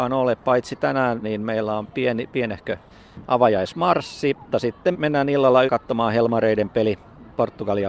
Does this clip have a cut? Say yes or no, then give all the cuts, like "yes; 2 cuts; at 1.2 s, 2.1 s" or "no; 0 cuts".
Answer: yes; 4 cuts; at 1.2 s, 4.5 s, 4.9 s, 5.7 s